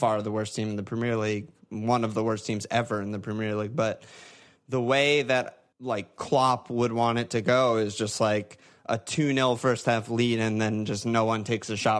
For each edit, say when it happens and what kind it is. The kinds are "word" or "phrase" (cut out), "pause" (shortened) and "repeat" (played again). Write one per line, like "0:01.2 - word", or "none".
0:05.7 - pause

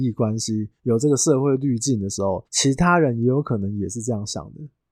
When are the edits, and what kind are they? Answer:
0:02.4 - pause

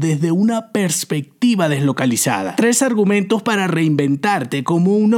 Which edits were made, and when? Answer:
none

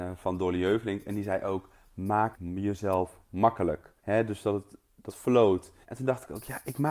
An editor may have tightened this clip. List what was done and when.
0:02.3 - word
0:04.0 - pause
0:05.1 - phrase
0:05.8 - pause

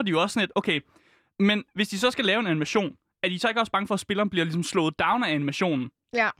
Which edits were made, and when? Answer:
none

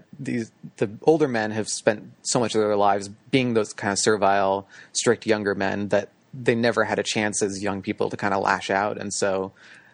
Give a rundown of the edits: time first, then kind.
0:03.2 - pause

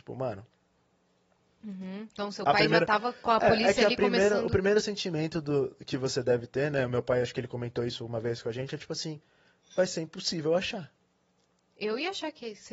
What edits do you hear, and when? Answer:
none

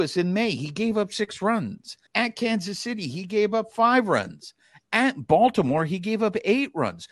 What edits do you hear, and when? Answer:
0:02.1 - pause

